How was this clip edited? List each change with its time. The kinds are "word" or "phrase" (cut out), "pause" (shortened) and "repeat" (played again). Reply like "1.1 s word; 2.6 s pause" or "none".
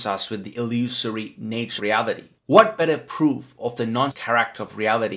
1.8 s word; 2.4 s pause; 4.1 s word